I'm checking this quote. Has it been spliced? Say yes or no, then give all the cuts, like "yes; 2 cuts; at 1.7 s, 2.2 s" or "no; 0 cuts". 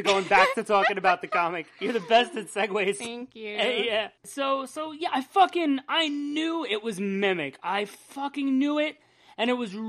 no; 0 cuts